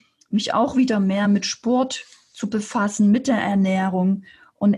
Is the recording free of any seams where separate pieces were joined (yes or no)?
yes